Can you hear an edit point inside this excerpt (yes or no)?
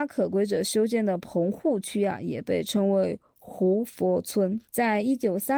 yes